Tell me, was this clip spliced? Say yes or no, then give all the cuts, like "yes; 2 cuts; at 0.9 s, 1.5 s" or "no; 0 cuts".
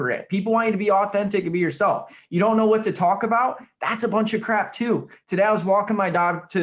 no; 0 cuts